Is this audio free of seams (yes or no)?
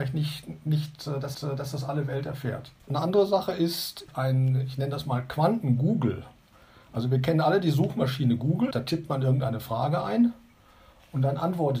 no